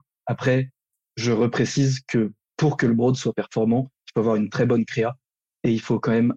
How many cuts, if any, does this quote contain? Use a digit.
0